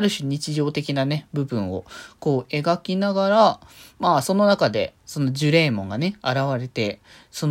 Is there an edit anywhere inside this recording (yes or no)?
no